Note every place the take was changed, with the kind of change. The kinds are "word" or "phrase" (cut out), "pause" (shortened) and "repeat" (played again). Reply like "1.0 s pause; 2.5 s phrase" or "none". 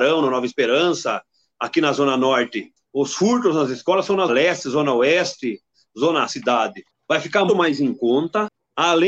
4.3 s word; 6.3 s phrase; 7.5 s word